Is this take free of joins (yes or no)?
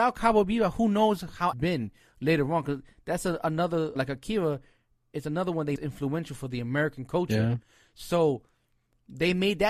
no